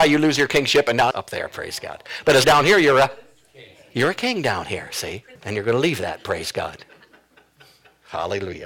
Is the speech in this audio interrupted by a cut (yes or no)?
yes